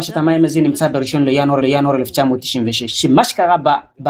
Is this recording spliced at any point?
yes; 1 cut; at 1.6 s

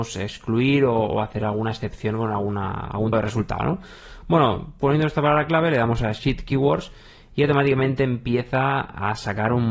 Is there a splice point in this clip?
yes; 1 cut; at 3.1 s

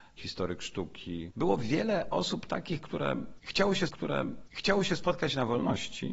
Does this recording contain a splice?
yes; 1 cut; at 3.9 s

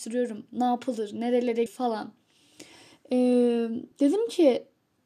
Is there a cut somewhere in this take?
yes; 2 cuts; at 1.7 s, 3.9 s

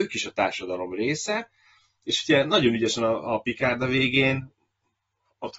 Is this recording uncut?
yes; 0 cuts

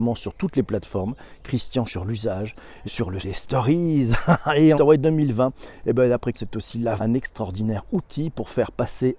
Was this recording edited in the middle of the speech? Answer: yes; 6 cuts; at 1.9 s, 2.8 s, 3.2 s, 4.7 s, 6.3 s, 7.0 s

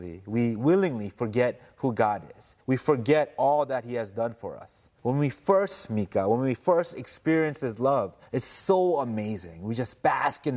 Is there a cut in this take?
yes; 3 cuts; at 2.6 s, 5.0 s, 8.3 s

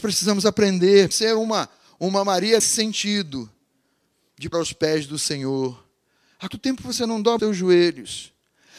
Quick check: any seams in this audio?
yes; 5 cuts; at 1.1 s, 2.6 s, 4.5 s, 6.5 s, 7.4 s

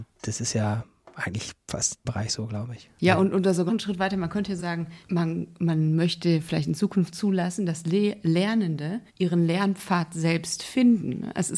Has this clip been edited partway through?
yes; 5 cuts; at 2.0 s, 3.7 s, 4.6 s, 5.0 s, 9.1 s

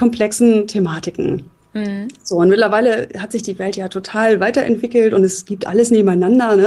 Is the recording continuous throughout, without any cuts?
yes; 0 cuts

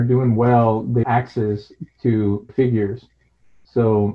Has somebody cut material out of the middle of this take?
yes; 2 cuts; at 1.0 s, 2.5 s

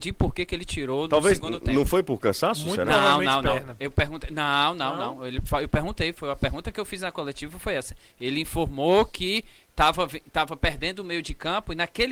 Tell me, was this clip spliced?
no; 0 cuts

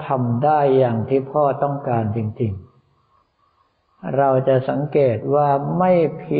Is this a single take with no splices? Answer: yes; 0 cuts

